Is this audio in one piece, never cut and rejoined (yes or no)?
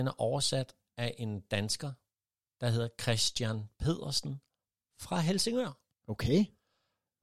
yes